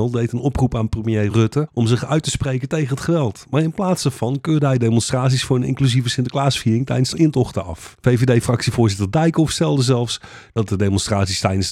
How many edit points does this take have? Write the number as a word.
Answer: zero